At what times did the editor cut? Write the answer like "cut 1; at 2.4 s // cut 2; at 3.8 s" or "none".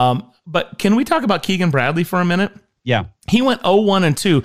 none